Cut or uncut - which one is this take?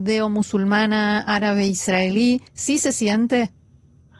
cut